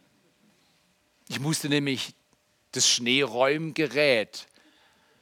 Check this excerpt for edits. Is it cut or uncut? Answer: uncut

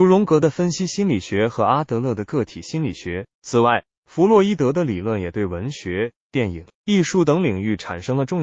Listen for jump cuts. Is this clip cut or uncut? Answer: cut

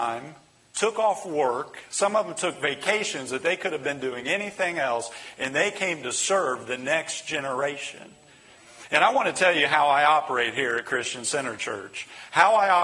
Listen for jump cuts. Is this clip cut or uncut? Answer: uncut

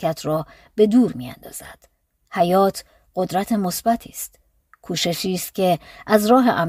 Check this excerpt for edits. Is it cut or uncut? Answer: uncut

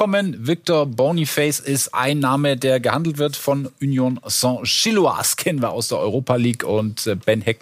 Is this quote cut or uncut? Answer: uncut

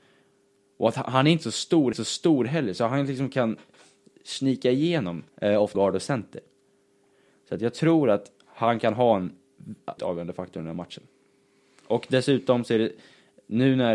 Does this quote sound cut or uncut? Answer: cut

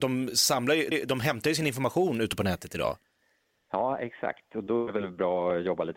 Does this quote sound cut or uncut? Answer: cut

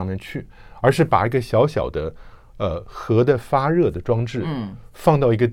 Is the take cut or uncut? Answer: uncut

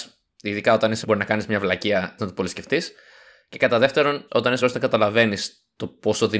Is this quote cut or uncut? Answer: cut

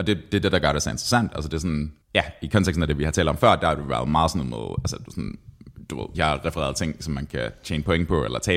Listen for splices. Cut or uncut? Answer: cut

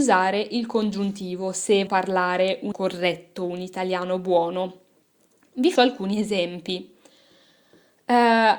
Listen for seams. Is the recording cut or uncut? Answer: cut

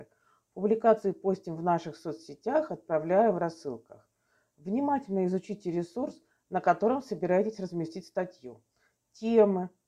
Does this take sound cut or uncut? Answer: uncut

